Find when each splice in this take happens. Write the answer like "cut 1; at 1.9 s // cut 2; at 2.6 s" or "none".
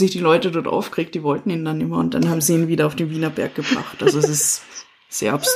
none